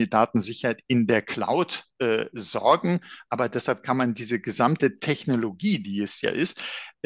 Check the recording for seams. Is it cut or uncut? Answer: uncut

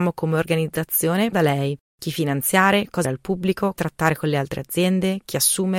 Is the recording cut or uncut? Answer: cut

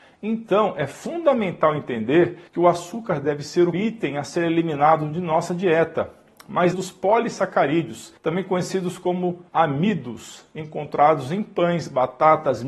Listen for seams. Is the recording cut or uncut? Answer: cut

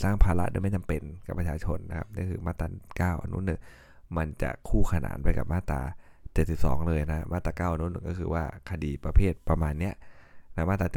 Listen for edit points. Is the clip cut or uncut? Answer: uncut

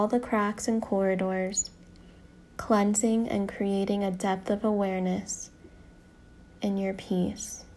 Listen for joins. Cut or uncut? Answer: uncut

